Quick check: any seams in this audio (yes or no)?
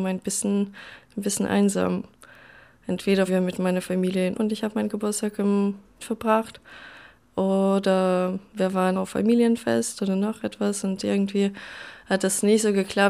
yes